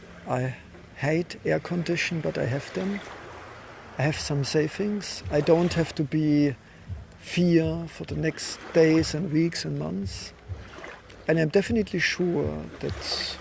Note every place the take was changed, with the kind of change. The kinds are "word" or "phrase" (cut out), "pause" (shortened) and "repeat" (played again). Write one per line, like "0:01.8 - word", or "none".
none